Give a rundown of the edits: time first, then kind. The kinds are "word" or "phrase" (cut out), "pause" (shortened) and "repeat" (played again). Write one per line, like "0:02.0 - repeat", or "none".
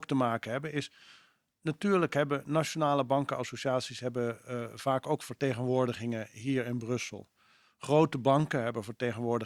none

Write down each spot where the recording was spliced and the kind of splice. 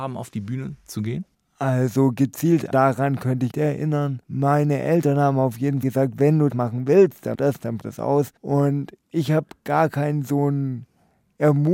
0:01.3 - pause
0:02.7 - word
0:03.5 - phrase
0:04.2 - pause
0:05.8 - word
0:06.5 - word
0:07.3 - word
0:07.8 - word
0:08.4 - pause

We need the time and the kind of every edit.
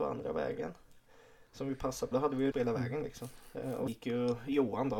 0:02.1 - word
0:02.5 - phrase
0:03.9 - word

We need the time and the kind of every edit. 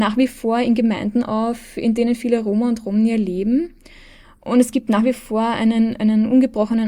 none

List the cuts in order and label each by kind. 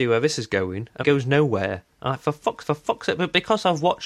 0:01.0 - word
0:02.6 - repeat

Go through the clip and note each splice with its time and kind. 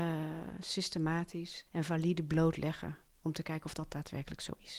0:01.7 - pause

